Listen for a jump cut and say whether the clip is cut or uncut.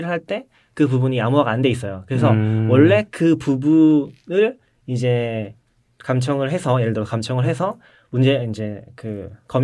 uncut